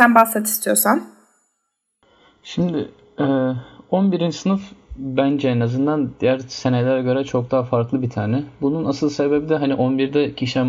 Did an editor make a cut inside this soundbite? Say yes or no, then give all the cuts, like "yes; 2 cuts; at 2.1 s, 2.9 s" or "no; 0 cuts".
no; 0 cuts